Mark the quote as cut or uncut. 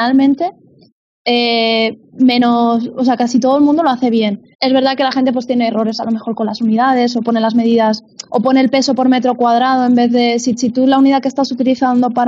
cut